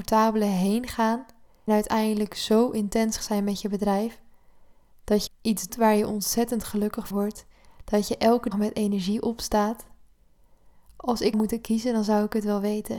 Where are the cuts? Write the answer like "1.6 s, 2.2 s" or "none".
1.7 s, 3.2 s, 5.3 s, 5.7 s, 7.1 s, 8.5 s, 11.3 s